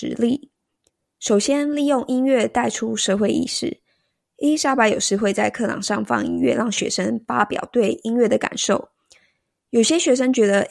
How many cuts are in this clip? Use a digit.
0